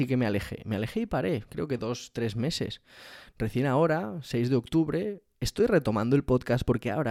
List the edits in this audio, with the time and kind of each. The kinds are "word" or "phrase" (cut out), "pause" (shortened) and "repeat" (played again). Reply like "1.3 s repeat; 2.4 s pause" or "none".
none